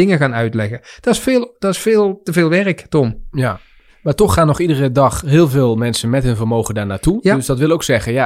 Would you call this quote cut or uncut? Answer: uncut